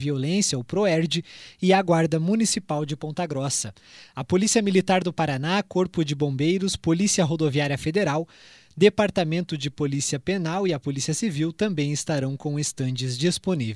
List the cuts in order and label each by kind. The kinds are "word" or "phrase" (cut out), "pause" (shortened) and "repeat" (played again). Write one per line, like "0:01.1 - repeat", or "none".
none